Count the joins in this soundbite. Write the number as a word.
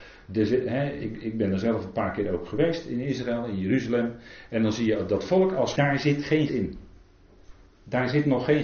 two